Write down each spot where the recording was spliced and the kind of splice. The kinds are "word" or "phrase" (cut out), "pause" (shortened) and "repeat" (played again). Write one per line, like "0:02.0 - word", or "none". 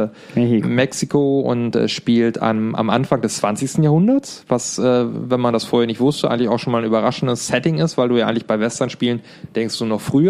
none